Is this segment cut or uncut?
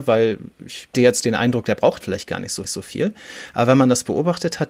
cut